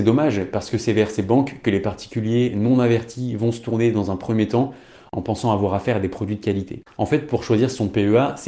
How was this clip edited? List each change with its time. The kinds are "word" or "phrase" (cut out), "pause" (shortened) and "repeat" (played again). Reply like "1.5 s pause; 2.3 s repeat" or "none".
none